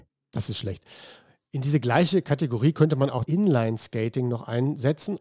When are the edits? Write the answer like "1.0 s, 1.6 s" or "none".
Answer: 3.2 s